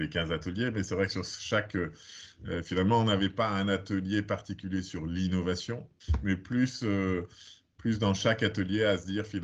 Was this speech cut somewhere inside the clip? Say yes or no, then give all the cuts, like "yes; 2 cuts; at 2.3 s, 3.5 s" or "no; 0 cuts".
no; 0 cuts